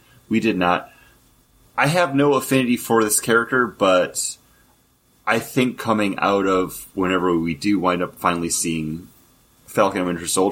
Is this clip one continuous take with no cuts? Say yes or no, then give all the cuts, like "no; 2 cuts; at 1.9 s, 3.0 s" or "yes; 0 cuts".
yes; 0 cuts